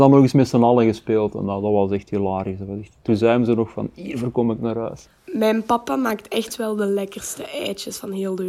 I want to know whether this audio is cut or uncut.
cut